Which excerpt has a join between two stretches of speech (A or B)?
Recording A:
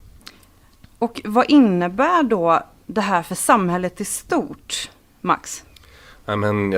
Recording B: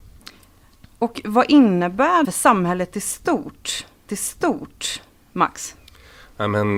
B